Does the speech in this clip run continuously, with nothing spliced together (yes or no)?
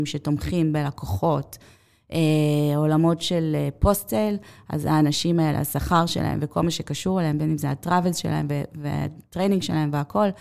yes